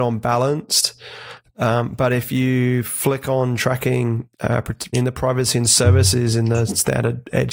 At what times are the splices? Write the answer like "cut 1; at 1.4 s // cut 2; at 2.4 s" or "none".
cut 1; at 4.3 s // cut 2; at 4.9 s